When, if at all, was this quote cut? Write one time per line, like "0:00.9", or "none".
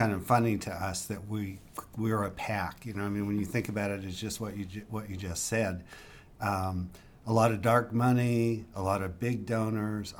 none